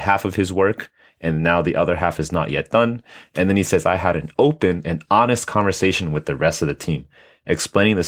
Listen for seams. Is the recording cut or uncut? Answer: uncut